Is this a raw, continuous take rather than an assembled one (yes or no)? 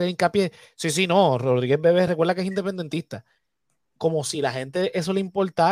yes